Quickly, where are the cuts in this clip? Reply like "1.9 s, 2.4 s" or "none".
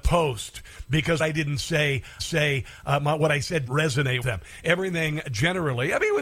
1.2 s, 2.2 s, 3.7 s, 4.2 s